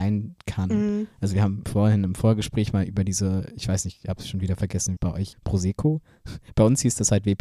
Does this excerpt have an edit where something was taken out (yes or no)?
yes